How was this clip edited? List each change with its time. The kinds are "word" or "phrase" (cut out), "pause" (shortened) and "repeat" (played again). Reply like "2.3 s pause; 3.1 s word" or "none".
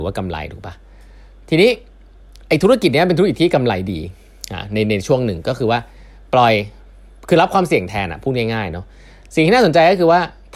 none